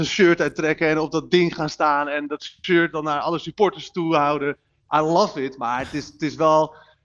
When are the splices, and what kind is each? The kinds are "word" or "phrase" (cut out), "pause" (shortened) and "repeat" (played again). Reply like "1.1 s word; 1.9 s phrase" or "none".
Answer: none